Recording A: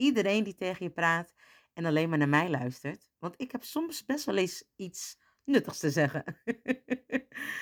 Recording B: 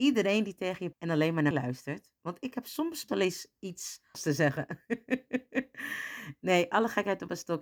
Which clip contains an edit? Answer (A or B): B